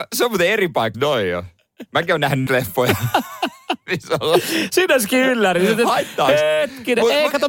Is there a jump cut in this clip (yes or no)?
yes